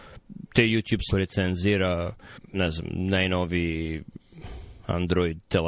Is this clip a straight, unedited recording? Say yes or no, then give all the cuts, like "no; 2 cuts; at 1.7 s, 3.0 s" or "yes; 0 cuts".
no; 2 cuts; at 1.1 s, 2.4 s